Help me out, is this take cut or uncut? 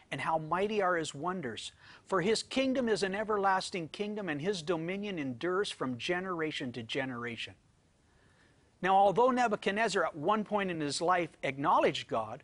uncut